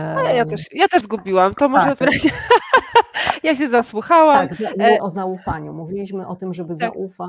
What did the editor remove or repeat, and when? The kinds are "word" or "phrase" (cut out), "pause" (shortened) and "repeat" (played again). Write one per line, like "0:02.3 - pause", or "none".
0:01.0 - word
0:02.0 - word
0:05.0 - word